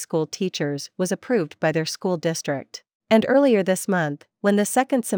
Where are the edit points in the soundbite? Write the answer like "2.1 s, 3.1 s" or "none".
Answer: 3.0 s